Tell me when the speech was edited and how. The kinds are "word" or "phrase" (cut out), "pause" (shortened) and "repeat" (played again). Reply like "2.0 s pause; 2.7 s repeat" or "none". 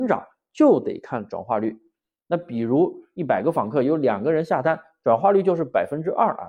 none